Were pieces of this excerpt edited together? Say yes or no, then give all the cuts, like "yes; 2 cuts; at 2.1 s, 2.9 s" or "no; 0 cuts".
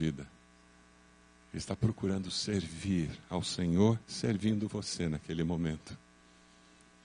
yes; 1 cut; at 4.0 s